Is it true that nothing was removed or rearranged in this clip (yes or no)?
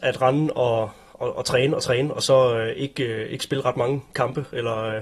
yes